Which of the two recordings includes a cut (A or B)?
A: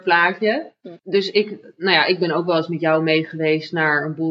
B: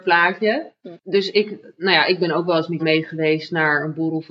B